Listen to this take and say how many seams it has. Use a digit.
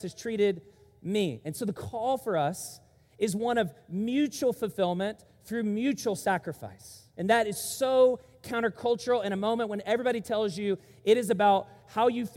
0